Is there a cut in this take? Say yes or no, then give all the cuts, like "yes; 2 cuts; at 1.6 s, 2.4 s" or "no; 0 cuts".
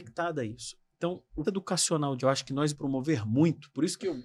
yes; 3 cuts; at 1.4 s, 2.2 s, 2.7 s